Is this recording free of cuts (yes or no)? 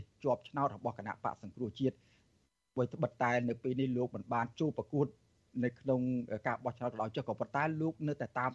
yes